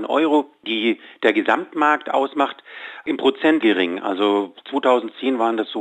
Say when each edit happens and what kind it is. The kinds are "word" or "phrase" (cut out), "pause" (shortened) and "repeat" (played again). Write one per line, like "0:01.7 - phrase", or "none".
0:03.6 - phrase